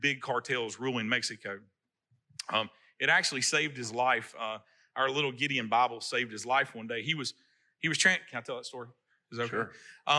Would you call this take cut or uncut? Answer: uncut